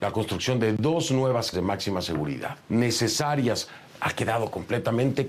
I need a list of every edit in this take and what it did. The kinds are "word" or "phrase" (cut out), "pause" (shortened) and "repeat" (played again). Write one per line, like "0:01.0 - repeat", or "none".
0:01.5 - word
0:02.6 - pause

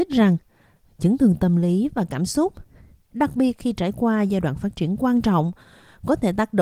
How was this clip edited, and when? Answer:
none

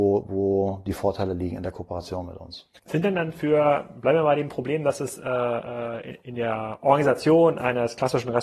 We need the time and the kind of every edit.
0:02.8 - pause

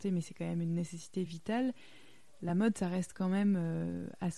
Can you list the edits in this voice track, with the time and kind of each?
none

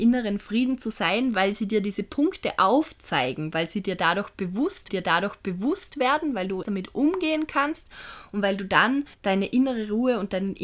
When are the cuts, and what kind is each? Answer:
0:04.9 - repeat
0:06.6 - word
0:09.1 - pause

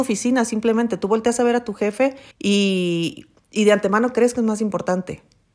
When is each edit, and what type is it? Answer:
0:02.3 - pause

